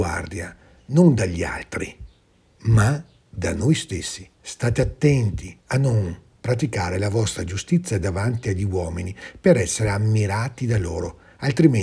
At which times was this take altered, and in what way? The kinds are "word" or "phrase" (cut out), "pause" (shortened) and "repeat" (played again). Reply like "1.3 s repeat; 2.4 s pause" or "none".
4.3 s pause; 5.6 s pause